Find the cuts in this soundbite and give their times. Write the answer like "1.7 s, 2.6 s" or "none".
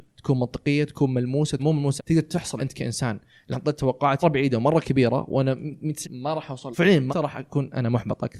1.6 s, 2.0 s, 2.6 s, 3.5 s, 4.2 s, 6.0 s, 6.7 s, 7.1 s